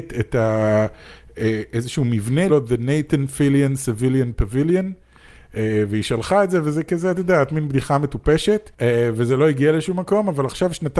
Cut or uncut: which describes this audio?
cut